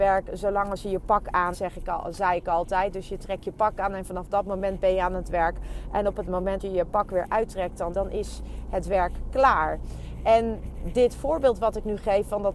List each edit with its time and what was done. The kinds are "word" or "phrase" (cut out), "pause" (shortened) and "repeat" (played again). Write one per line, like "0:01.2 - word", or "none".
0:01.5 - word
0:06.6 - word
0:07.9 - word